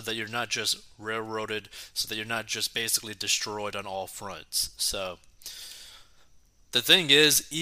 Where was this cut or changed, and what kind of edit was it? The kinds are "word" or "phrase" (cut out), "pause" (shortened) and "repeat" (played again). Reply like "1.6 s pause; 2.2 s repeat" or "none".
none